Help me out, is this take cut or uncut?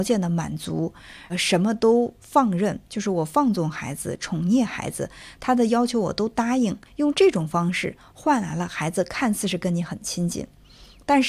cut